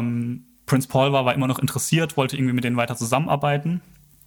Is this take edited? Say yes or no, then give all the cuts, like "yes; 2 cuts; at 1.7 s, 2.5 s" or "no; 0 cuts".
no; 0 cuts